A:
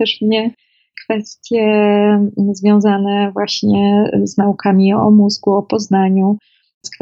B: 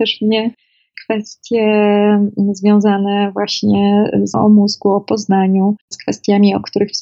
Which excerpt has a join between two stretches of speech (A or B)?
B